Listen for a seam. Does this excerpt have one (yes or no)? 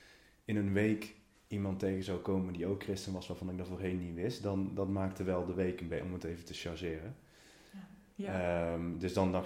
no